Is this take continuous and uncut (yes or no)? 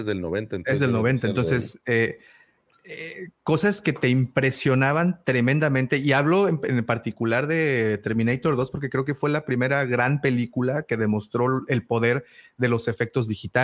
yes